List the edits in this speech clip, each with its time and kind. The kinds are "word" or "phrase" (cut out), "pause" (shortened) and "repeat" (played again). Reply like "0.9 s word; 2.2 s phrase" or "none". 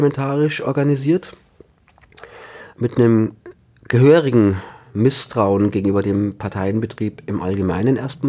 none